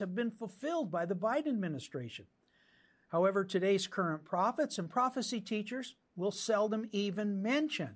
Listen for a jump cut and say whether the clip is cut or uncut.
cut